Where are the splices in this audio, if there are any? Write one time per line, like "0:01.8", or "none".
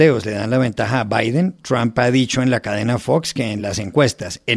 none